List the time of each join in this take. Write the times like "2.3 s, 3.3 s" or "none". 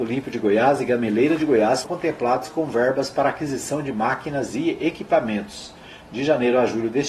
1.8 s